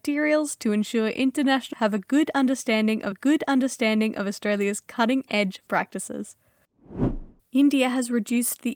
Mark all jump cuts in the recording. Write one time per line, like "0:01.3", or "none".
0:01.7
0:03.1
0:05.7
0:07.4